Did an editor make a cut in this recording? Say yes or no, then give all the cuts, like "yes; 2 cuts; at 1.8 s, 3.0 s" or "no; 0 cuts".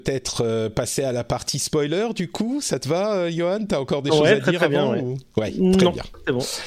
no; 0 cuts